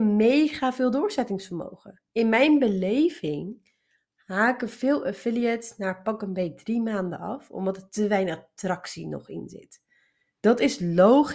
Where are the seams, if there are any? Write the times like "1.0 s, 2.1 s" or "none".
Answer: 2.1 s